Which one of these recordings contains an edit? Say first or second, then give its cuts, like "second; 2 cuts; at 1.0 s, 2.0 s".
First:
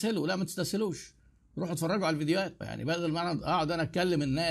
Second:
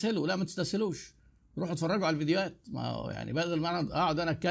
first; 1 cut; at 2.6 s